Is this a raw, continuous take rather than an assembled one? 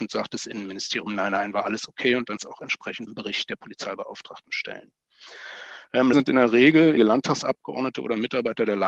no; 4 cuts; at 2.4 s, 3.1 s, 6.1 s, 7.0 s

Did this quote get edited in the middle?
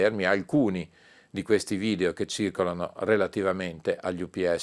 no; 0 cuts

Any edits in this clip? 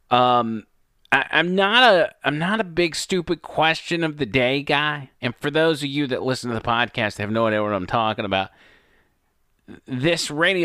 yes; 2 cuts; at 1.0 s, 5.1 s

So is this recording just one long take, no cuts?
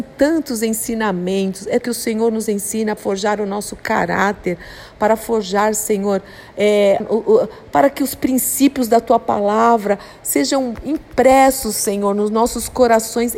no; 3 cuts; at 1.8 s, 3.0 s, 7.0 s

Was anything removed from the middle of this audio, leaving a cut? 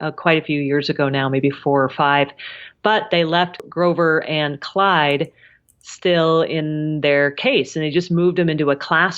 no; 0 cuts

